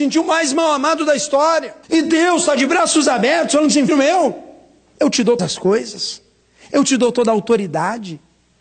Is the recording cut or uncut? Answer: cut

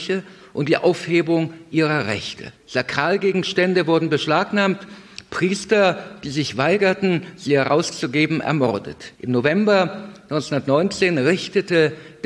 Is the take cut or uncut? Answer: cut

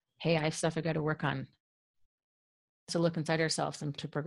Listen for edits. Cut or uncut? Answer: cut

